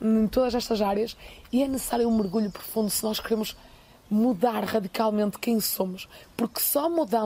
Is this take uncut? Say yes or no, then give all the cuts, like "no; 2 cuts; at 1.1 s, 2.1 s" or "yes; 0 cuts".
yes; 0 cuts